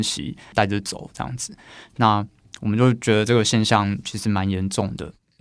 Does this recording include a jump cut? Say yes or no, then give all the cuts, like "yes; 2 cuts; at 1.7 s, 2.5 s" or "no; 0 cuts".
no; 0 cuts